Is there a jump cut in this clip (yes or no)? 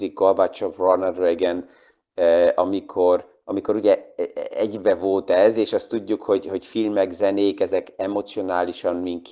no